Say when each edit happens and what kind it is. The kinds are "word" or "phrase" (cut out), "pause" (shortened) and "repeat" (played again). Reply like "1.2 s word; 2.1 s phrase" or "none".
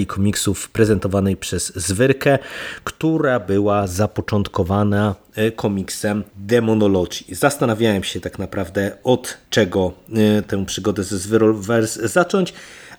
6.3 s pause; 9.5 s pause